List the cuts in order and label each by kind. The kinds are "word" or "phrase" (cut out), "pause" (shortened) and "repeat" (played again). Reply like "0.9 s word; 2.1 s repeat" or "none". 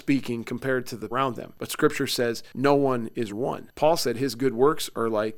1.1 s phrase; 3.3 s phrase